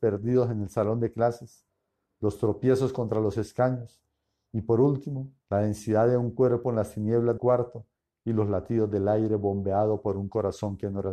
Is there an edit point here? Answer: yes; 2 cuts; at 5.4 s, 7.4 s

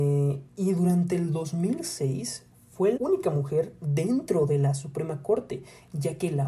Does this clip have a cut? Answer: yes; 1 cut; at 3.0 s

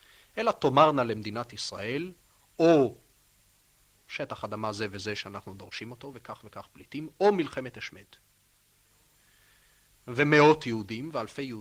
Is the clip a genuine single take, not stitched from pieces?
yes; 0 cuts

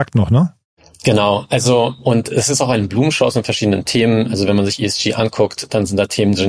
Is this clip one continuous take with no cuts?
yes; 0 cuts

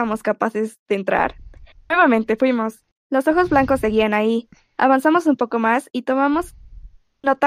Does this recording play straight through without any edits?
yes; 0 cuts

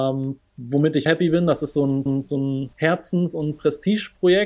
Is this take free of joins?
no; 3 cuts; at 1.1 s, 2.1 s, 2.7 s

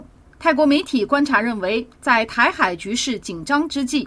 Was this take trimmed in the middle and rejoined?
yes; 1 cut; at 1.9 s

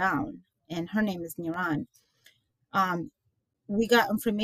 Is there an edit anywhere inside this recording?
no; 0 cuts

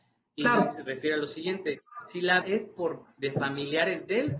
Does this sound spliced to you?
yes; 2 cuts; at 2.4 s, 3.0 s

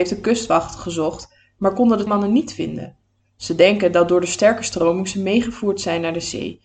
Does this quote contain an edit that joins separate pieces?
yes; 1 cut; at 2.1 s

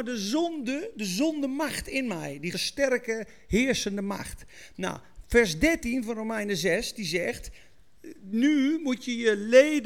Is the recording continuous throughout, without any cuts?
no; 1 cut; at 2.5 s

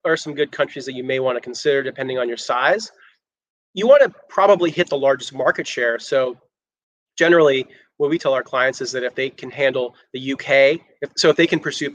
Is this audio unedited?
yes; 0 cuts

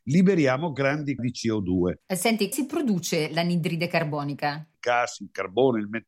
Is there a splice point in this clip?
yes; 2 cuts; at 1.2 s, 2.5 s

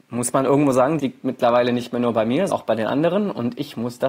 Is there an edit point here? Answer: yes; 2 cuts; at 1.0 s, 2.5 s

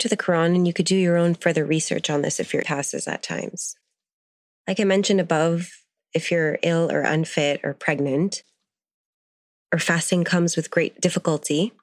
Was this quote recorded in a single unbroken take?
no; 1 cut; at 2.6 s

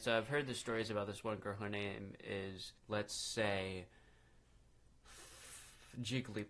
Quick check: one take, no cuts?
no; 1 cut; at 2.8 s

